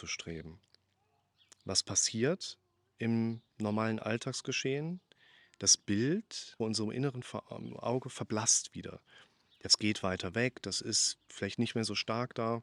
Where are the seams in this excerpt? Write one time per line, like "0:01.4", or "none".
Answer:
0:06.6

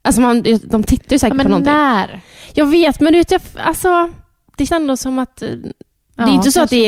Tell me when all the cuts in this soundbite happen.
0:04.7

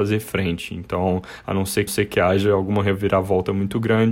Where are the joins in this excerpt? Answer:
0:01.9

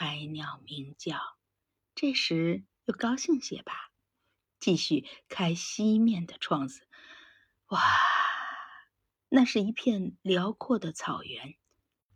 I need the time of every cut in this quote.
none

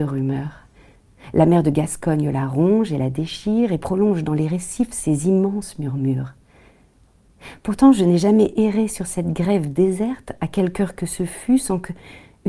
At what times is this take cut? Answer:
none

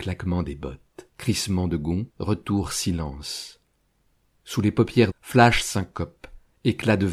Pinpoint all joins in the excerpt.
0:01.1
0:02.1
0:05.1

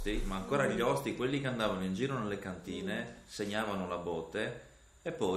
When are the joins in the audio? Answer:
none

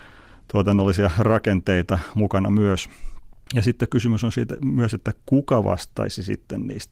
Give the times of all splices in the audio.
0:05.2

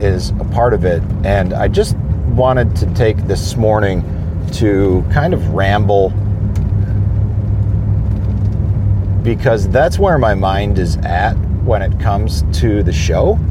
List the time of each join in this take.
none

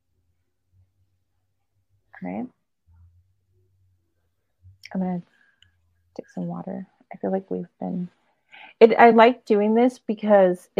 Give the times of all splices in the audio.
none

